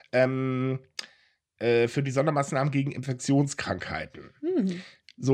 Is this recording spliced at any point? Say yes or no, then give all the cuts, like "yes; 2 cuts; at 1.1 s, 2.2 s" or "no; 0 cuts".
no; 0 cuts